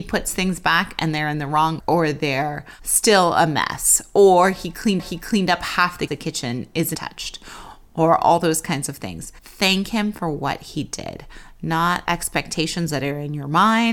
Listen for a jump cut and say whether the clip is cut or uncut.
cut